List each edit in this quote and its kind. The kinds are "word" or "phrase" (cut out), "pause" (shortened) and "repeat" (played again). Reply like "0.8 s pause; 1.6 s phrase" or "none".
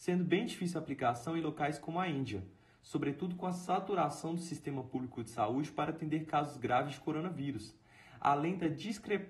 none